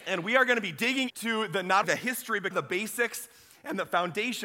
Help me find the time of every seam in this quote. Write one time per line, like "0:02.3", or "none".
0:01.1
0:01.8
0:02.5